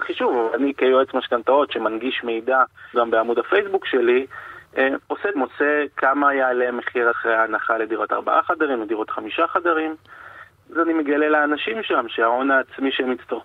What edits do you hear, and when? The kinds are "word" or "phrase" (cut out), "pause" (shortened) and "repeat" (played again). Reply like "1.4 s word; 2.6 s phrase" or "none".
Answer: 2.9 s word; 5.0 s pause; 5.3 s word; 7.1 s word; 10.7 s word